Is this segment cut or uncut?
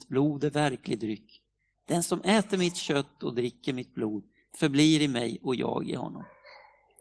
uncut